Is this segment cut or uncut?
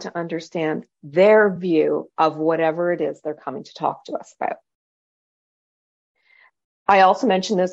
uncut